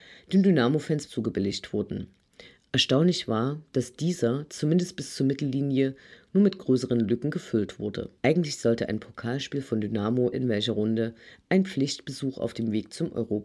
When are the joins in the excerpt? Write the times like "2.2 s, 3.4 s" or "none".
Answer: 1.1 s, 8.2 s, 10.3 s